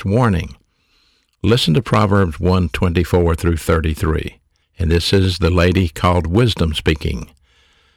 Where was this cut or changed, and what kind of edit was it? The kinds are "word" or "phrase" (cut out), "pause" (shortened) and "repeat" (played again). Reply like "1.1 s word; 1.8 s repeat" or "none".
4.6 s pause

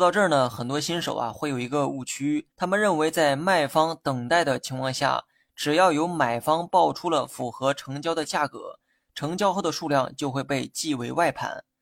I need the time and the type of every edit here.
2.5 s pause

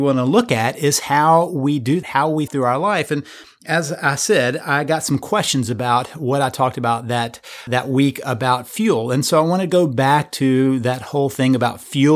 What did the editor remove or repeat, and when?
2.0 s word; 2.5 s word; 7.7 s word

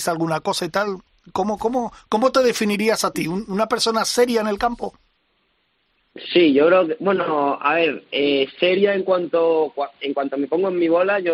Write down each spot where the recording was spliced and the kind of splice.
none

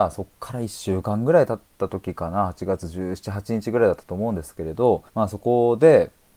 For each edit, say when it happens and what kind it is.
5.1 s pause

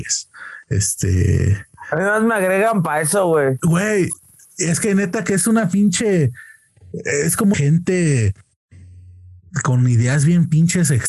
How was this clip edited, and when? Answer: 7.5 s phrase

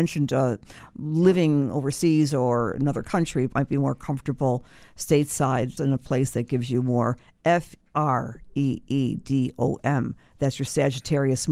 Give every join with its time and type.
3.5 s phrase; 5.8 s word; 7.8 s pause

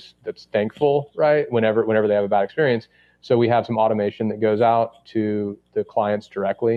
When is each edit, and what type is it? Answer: none

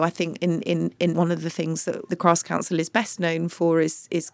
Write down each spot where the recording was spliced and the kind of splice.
1.1 s word; 2.1 s word

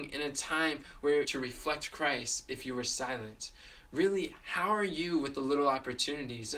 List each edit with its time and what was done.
1.2 s phrase

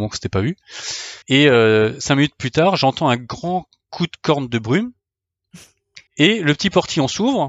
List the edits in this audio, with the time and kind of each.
1.2 s pause; 6.1 s pause

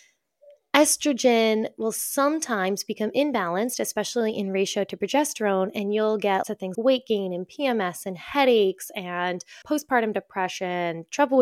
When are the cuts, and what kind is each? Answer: 6.4 s word; 6.7 s word; 9.6 s word

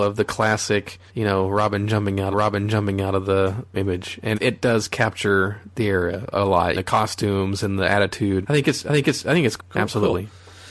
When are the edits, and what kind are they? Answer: 1.1 s pause; 2.3 s repeat; 3.7 s phrase; 4.3 s word; 6.7 s phrase; 8.4 s word; 8.9 s repeat; 9.6 s word

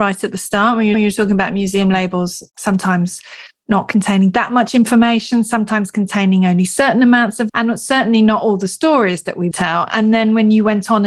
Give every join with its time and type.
0.9 s repeat; 7.5 s word; 9.5 s phrase

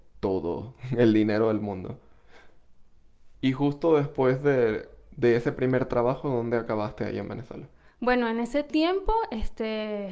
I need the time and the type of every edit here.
3.3 s pause

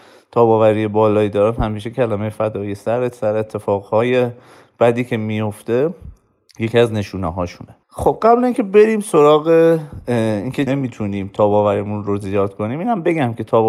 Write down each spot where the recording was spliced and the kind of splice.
7.8 s pause; 10.7 s word

